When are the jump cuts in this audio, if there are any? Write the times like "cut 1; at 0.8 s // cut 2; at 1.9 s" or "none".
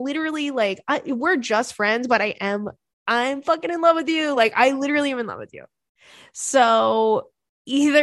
none